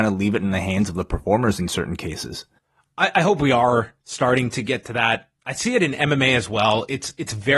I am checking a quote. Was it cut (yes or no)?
yes